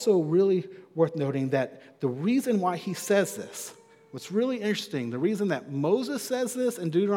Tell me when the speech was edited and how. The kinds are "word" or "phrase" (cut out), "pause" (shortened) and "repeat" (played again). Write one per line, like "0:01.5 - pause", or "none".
none